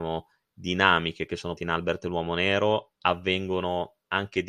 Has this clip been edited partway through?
yes; 2 cuts; at 1.6 s, 2.9 s

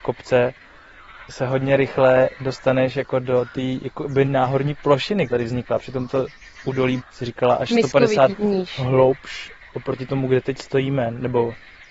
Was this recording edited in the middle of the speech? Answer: yes; 4 cuts; at 4.2 s, 5.3 s, 7.0 s, 8.3 s

